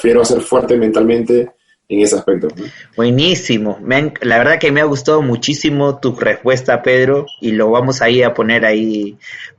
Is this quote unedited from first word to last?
yes; 0 cuts

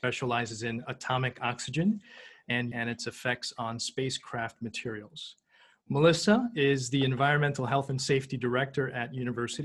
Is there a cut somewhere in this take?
yes; 1 cut; at 2.7 s

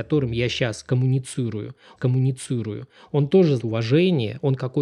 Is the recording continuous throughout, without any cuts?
no; 2 cuts; at 2.0 s, 3.6 s

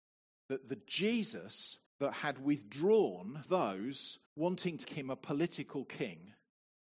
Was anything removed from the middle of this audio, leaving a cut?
yes; 4 cuts; at 1.9 s, 3.5 s, 4.3 s, 4.8 s

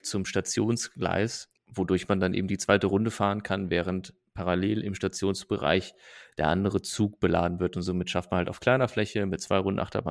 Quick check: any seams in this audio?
yes; 1 cut; at 1.6 s

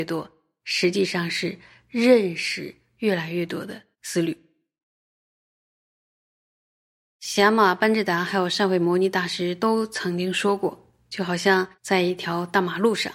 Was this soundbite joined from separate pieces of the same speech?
yes; 2 cuts; at 3.9 s, 11.7 s

